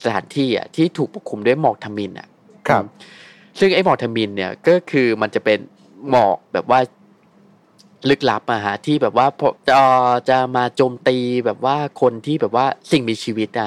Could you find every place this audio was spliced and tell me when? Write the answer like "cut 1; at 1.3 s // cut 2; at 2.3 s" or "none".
cut 1; at 9.6 s